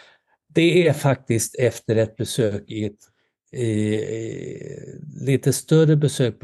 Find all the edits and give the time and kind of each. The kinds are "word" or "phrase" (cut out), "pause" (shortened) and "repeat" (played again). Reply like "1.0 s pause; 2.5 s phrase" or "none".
none